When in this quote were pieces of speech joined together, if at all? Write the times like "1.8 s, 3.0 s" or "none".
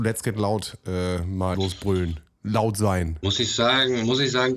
1.5 s